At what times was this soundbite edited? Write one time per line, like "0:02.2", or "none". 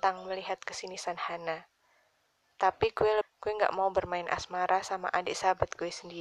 0:03.2